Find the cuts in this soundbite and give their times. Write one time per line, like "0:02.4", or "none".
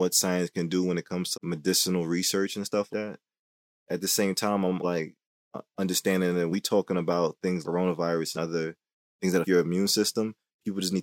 0:01.3
0:02.9
0:04.8
0:06.5
0:07.6
0:08.4
0:09.4